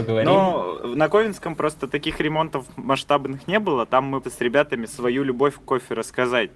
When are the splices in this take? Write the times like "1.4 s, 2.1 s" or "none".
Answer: 4.2 s, 4.9 s

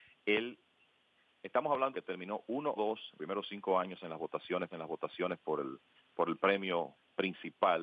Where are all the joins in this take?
1.9 s, 2.8 s, 3.2 s, 4.7 s

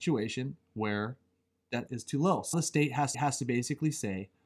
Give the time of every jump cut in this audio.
1.9 s, 2.5 s, 3.1 s

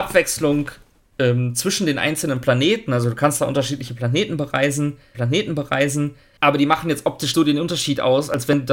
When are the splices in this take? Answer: 5.1 s, 7.3 s

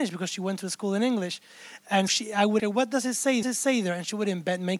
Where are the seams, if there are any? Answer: 2.1 s, 2.6 s, 3.4 s

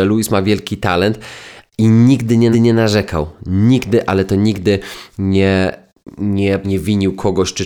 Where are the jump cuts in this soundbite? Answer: 2.5 s, 6.6 s

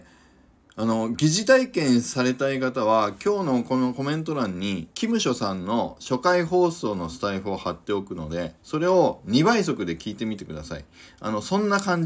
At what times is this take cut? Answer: 4.9 s

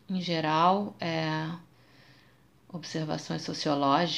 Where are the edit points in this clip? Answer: none

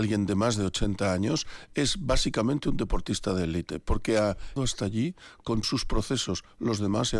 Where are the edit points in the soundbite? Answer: 4.6 s, 5.6 s

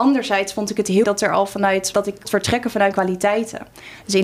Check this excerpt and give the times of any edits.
1.0 s, 1.9 s, 2.2 s, 2.9 s

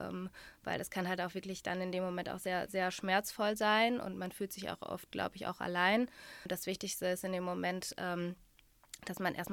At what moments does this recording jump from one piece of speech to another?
none

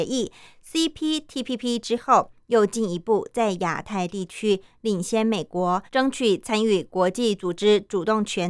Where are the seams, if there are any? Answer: 5.9 s

